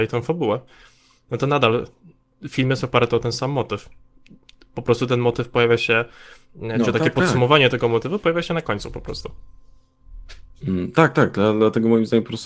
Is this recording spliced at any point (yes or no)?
no